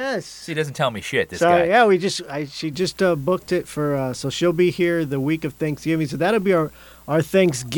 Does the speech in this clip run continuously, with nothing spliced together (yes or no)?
yes